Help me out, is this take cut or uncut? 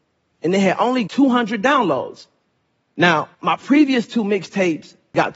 cut